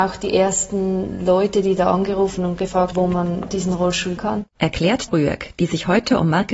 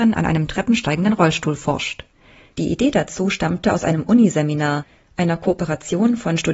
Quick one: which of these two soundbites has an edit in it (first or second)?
first